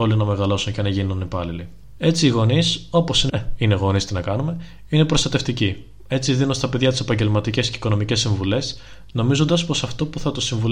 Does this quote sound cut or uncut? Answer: cut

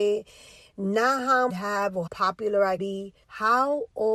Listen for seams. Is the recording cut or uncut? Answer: cut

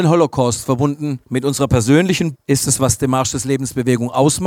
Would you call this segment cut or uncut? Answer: cut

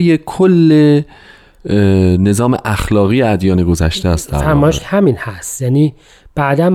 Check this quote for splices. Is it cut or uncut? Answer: cut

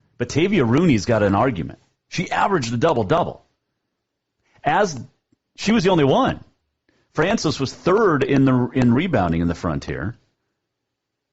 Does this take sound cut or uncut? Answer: uncut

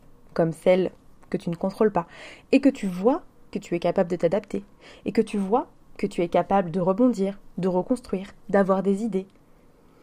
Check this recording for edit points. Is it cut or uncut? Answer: uncut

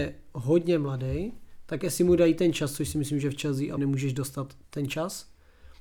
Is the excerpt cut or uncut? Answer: cut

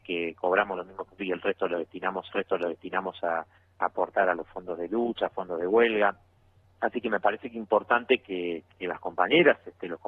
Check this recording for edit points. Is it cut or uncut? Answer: cut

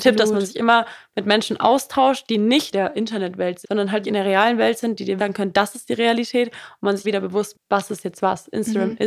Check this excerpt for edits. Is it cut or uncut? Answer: cut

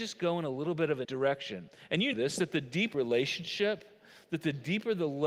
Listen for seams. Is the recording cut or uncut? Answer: cut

